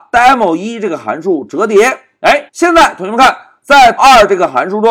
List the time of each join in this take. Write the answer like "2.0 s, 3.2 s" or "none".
2.5 s, 4.0 s